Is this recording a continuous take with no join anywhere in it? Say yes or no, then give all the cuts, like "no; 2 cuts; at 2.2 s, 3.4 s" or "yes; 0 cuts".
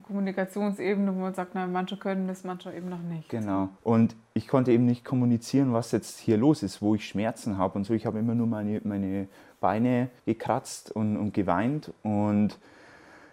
no; 2 cuts; at 3.8 s, 10.2 s